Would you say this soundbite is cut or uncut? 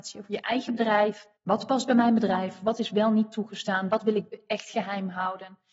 cut